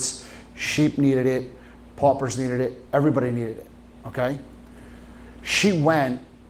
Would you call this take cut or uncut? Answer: uncut